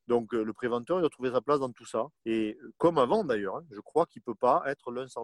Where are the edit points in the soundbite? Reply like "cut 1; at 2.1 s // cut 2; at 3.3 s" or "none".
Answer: cut 1; at 2.2 s